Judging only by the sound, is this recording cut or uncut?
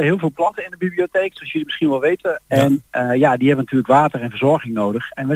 uncut